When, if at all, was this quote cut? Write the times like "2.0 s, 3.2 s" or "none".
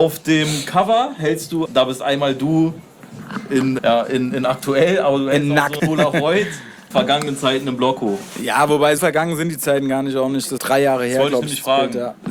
1.7 s, 3.8 s, 5.8 s, 6.9 s, 9.0 s, 10.6 s